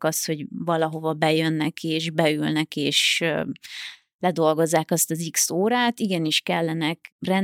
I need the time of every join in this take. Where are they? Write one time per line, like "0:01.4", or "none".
none

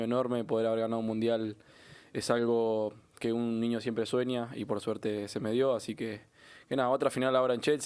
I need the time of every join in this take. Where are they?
none

